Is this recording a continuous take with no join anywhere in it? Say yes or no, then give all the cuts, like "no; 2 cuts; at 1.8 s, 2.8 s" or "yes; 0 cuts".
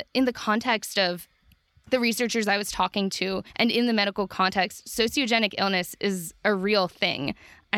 no; 1 cut; at 3.5 s